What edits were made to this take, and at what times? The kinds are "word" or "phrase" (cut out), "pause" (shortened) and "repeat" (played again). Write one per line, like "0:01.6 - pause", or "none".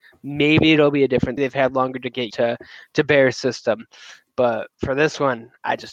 0:01.4 - phrase
0:02.3 - word